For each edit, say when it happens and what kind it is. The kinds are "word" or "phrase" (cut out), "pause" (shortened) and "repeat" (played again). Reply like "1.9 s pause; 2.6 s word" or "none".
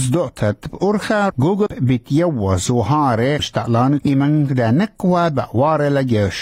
1.3 s word; 1.7 s word; 3.4 s word; 4.0 s word